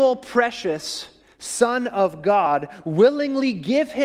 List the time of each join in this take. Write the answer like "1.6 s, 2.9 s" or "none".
1.2 s